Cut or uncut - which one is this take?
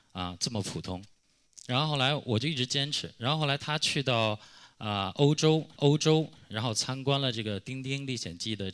cut